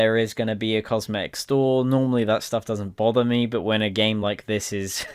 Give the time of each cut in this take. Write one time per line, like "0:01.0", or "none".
none